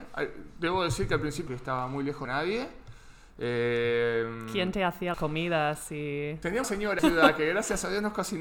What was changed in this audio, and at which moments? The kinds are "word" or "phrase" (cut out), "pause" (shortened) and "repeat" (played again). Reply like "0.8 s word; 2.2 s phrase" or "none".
1.5 s phrase; 2.2 s phrase; 5.1 s word; 6.6 s word; 7.0 s phrase